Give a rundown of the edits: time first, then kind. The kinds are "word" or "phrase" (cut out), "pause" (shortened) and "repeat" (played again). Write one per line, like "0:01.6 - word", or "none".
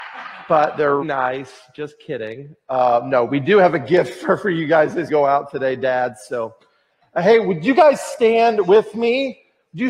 0:01.0 - word
0:05.1 - phrase

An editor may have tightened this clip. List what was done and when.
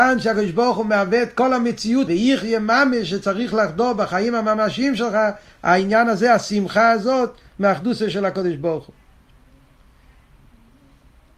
0:02.1 - phrase

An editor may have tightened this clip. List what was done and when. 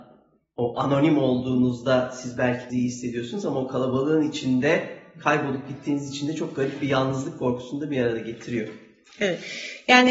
0:02.7 - word

